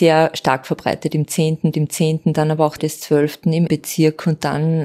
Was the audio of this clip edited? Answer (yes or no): yes